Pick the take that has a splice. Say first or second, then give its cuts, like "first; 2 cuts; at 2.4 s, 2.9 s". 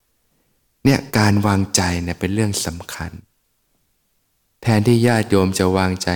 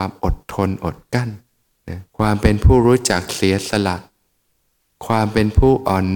second; 1 cut; at 2.1 s